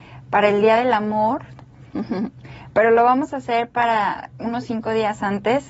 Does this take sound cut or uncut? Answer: uncut